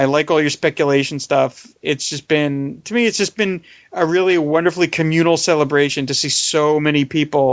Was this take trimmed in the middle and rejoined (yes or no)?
no